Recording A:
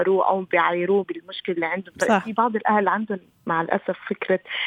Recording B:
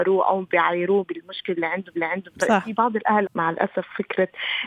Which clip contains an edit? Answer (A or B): B